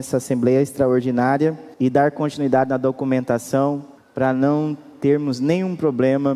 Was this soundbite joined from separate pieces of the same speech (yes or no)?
yes